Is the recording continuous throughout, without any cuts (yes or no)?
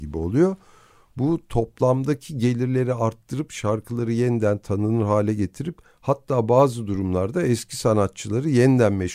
yes